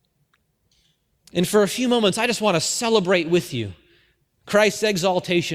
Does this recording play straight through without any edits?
yes; 0 cuts

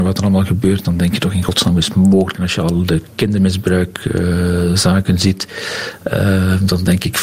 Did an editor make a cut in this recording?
no; 0 cuts

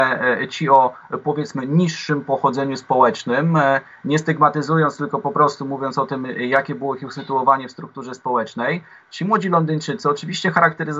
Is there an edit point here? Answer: no; 0 cuts

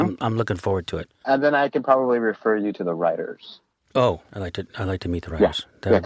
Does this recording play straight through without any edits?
yes; 0 cuts

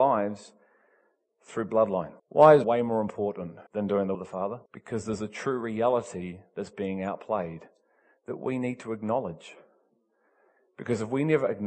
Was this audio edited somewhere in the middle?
yes; 5 cuts; at 2.2 s, 2.6 s, 3.7 s, 4.1 s, 4.7 s

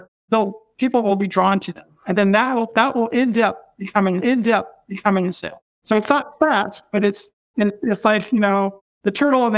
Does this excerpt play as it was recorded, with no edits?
no; 1 cut; at 4.2 s

